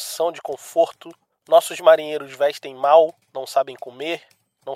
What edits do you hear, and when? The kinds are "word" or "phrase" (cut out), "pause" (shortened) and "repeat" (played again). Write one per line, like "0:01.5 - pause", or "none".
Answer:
0:01.3 - pause
0:03.2 - pause